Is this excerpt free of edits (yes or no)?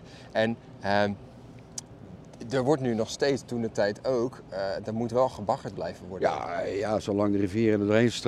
yes